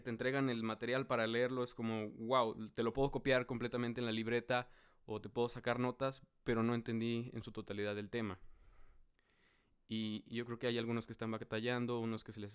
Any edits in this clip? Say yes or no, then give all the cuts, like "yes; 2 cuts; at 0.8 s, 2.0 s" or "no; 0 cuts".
no; 0 cuts